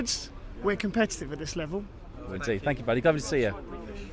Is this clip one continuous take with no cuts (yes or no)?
no